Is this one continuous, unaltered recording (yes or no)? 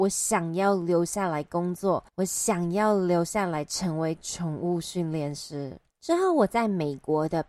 no